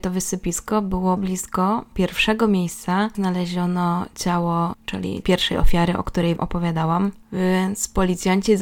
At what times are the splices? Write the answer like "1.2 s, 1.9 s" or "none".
1.2 s, 1.9 s, 3.1 s, 4.7 s, 5.2 s, 6.4 s